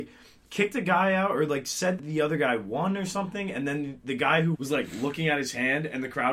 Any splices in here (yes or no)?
yes